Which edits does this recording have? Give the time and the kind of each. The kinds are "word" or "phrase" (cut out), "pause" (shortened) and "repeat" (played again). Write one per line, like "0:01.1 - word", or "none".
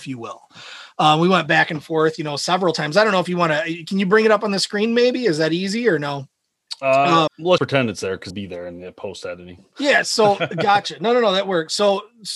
0:07.3 - word
0:07.6 - word
0:08.3 - word